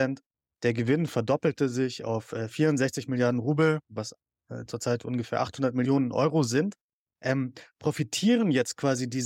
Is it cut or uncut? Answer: uncut